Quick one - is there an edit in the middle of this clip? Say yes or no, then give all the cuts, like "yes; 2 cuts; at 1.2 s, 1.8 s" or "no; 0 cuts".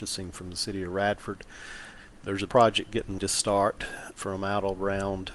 yes; 3 cuts; at 2.5 s, 3.2 s, 4.1 s